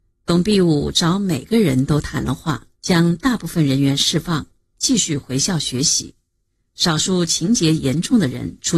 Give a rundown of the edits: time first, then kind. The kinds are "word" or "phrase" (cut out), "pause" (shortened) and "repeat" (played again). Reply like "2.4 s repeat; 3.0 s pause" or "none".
2.7 s pause